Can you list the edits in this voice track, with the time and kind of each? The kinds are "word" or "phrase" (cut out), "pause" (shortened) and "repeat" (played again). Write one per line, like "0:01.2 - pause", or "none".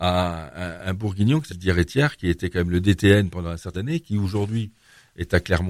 0:01.5 - word
0:03.7 - word